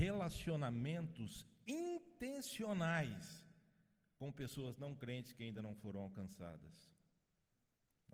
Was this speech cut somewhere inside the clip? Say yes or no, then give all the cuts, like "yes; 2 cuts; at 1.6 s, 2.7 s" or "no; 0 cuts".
no; 0 cuts